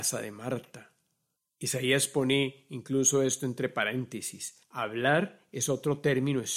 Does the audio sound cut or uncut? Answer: cut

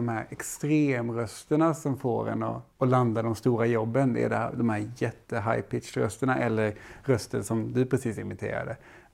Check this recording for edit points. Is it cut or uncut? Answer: cut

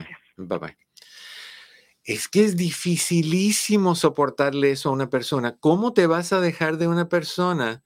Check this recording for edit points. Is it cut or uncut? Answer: uncut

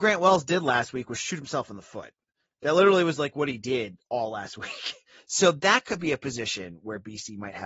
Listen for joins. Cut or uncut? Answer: uncut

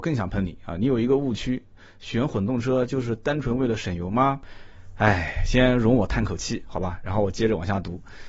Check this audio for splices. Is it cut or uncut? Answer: uncut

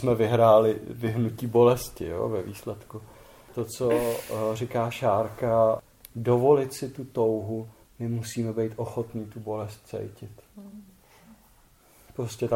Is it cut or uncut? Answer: uncut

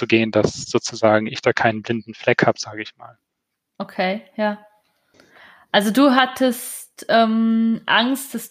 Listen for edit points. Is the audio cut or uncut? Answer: uncut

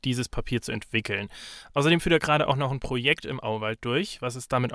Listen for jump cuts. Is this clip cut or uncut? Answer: uncut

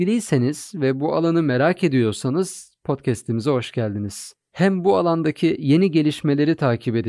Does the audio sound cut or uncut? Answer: uncut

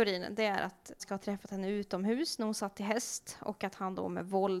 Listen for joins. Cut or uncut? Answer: cut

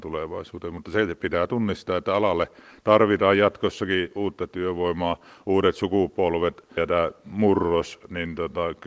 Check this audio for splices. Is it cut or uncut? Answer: cut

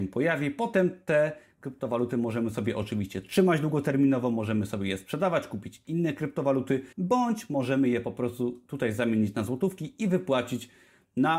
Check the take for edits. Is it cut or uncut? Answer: cut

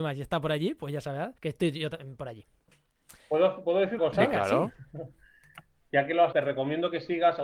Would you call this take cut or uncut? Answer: cut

